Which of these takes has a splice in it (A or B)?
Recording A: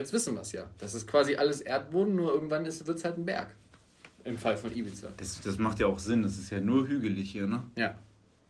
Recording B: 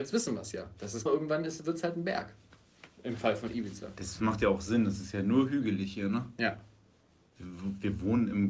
B